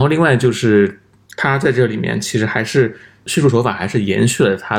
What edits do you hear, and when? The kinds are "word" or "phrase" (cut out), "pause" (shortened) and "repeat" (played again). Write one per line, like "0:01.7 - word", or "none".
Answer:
none